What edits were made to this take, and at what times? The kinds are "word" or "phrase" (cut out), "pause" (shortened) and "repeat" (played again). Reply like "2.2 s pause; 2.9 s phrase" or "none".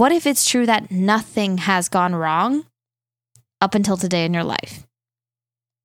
none